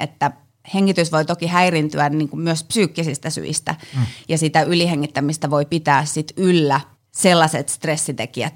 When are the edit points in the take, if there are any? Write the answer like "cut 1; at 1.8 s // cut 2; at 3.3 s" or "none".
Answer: cut 1; at 6.9 s